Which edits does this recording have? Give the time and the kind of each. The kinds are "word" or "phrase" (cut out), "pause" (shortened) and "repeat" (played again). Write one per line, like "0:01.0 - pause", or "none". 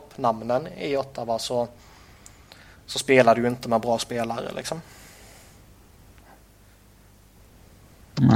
none